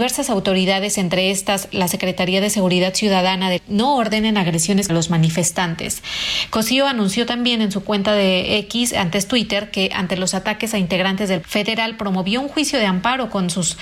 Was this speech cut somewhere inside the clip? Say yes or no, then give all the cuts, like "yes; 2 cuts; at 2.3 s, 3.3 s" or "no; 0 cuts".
yes; 3 cuts; at 3.6 s, 4.9 s, 11.4 s